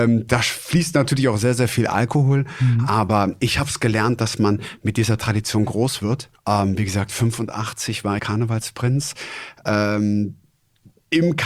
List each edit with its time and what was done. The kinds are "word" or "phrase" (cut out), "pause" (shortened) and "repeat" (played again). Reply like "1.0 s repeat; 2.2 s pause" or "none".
6.3 s pause; 8.2 s phrase